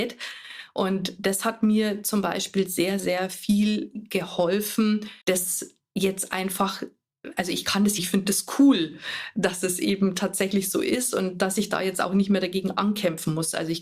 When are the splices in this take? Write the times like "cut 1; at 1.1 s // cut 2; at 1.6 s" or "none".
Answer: cut 1; at 3.0 s // cut 2; at 5.2 s // cut 3; at 8.0 s